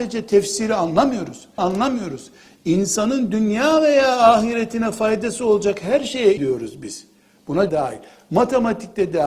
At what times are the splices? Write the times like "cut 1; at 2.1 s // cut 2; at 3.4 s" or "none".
cut 1; at 1.6 s // cut 2; at 6.4 s // cut 3; at 7.7 s